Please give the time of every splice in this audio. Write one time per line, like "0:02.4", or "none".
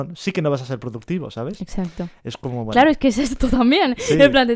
none